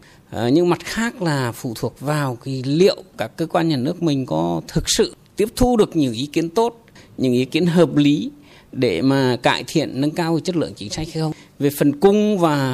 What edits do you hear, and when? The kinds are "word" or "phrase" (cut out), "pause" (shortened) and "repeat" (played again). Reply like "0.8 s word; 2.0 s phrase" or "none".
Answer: none